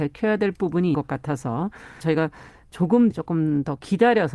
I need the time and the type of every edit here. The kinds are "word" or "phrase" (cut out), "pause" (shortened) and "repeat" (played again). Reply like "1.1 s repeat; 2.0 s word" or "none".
0.9 s word; 2.0 s word; 3.1 s word